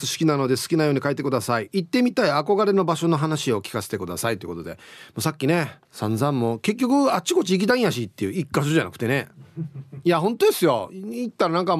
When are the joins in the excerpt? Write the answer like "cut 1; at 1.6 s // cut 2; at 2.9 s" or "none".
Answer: cut 1; at 5.8 s